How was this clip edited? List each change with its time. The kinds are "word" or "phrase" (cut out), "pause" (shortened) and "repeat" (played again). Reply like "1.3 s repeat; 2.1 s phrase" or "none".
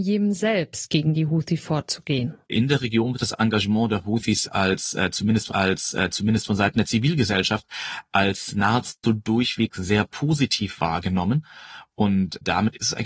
2.4 s pause; 5.5 s repeat